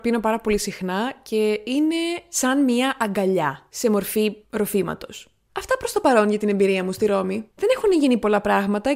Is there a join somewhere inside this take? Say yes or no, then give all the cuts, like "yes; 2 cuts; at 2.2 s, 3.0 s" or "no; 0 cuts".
no; 0 cuts